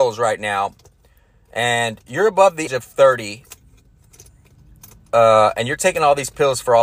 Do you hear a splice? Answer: yes; 1 cut; at 2.7 s

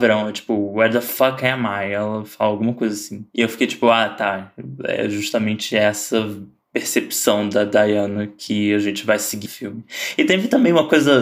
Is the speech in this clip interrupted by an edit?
yes; 1 cut; at 9.5 s

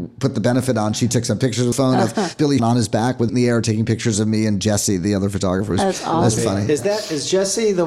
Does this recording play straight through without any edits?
no; 4 cuts; at 1.7 s, 2.6 s, 3.3 s, 6.4 s

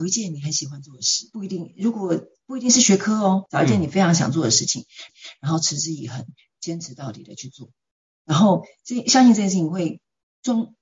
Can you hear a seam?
yes; 1 cut; at 5.1 s

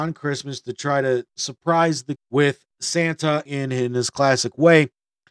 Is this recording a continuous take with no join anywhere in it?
no; 3 cuts; at 1.3 s, 2.2 s, 3.5 s

